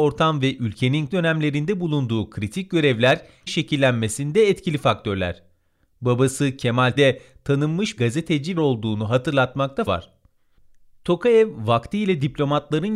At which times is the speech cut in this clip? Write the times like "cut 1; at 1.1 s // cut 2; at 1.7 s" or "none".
cut 1; at 1.1 s // cut 2; at 3.5 s // cut 3; at 7.0 s // cut 4; at 8.0 s // cut 5; at 8.6 s // cut 6; at 9.9 s